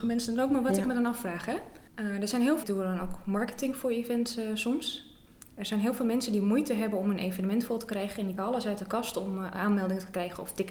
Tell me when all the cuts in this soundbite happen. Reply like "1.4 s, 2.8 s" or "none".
1.9 s, 2.6 s, 8.4 s